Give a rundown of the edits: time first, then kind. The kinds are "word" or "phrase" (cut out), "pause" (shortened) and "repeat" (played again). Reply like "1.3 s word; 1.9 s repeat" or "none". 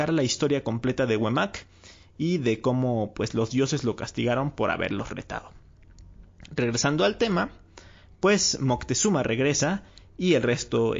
none